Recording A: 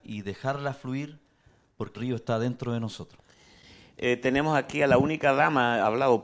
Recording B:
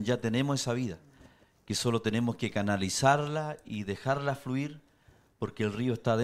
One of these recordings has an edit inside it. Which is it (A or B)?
A